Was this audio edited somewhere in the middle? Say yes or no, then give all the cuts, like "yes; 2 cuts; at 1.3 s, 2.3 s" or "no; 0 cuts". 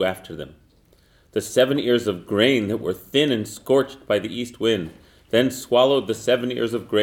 no; 0 cuts